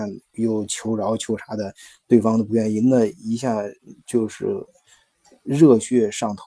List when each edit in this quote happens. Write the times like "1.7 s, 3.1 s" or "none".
none